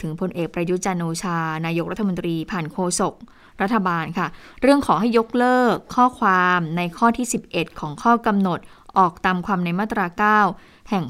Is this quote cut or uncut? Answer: uncut